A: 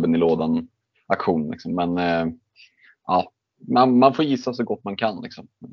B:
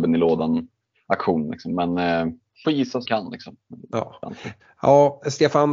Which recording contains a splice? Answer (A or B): B